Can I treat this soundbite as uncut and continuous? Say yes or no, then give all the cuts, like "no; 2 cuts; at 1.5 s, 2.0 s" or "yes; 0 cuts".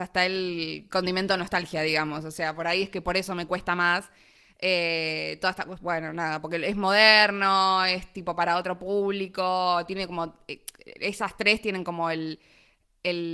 yes; 0 cuts